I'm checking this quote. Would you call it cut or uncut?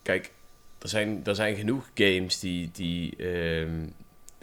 uncut